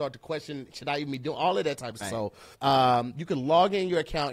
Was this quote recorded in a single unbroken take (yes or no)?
no